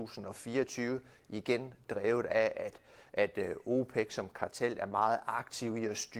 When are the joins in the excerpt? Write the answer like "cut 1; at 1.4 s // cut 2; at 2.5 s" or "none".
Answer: none